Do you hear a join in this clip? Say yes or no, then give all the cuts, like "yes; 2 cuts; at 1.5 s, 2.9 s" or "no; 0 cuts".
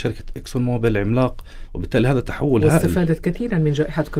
yes; 1 cut; at 1.7 s